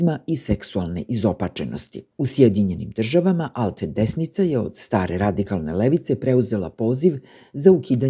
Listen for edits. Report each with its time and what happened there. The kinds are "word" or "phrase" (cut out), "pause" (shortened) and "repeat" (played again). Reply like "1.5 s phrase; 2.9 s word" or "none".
2.1 s pause